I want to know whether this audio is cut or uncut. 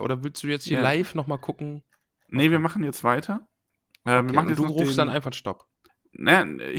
cut